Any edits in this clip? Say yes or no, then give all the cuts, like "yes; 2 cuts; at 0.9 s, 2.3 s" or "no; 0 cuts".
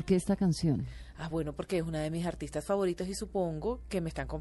no; 0 cuts